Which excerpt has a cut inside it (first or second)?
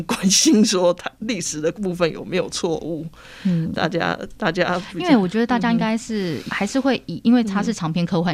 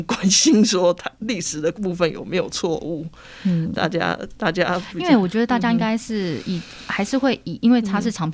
first